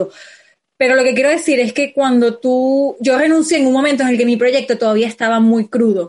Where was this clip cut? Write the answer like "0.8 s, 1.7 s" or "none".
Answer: none